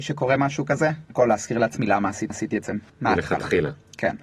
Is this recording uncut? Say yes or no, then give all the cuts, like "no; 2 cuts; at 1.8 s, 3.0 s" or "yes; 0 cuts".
no; 3 cuts; at 1.1 s, 2.3 s, 2.9 s